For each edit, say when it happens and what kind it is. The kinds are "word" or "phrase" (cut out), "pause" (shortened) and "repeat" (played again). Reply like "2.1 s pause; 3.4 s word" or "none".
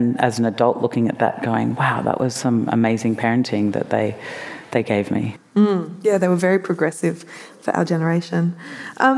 none